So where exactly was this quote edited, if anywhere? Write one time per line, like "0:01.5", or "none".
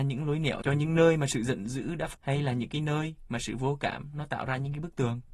0:02.1